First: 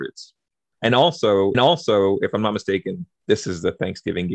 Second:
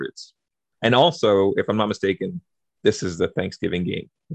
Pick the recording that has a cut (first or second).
first